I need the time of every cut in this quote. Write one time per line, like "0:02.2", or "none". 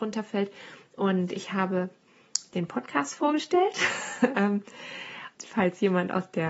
0:02.5
0:05.4